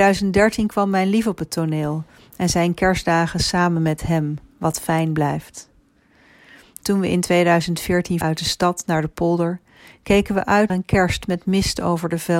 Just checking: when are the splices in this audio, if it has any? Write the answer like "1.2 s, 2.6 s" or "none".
8.2 s, 10.7 s